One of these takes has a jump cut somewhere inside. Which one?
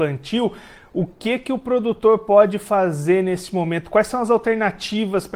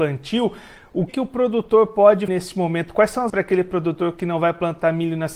second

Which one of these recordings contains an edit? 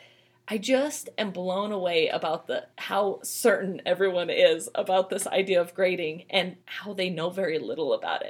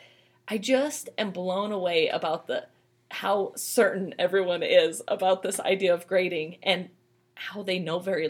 first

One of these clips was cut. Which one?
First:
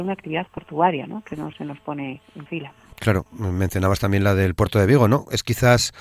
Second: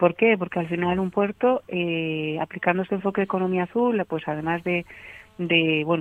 first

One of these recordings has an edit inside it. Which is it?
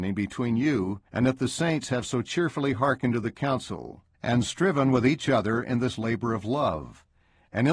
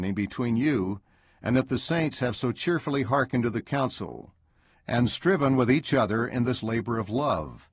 first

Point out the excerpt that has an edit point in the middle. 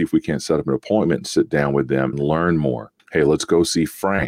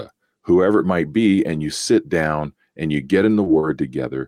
first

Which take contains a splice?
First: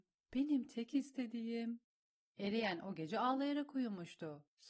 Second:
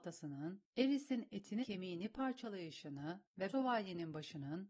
second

